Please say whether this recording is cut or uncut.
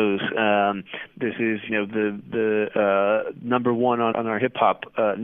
cut